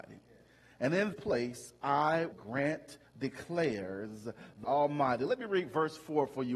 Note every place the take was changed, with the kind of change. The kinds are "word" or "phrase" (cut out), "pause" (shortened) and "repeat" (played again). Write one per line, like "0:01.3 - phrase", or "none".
0:01.1 - word
0:02.3 - word
0:03.0 - word
0:04.6 - word